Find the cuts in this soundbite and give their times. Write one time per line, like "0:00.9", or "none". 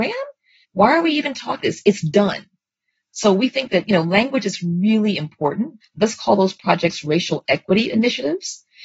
0:01.6